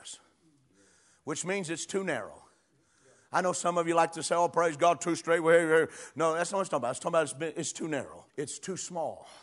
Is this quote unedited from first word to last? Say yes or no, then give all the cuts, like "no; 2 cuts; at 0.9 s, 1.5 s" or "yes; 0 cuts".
no; 1 cut; at 8.3 s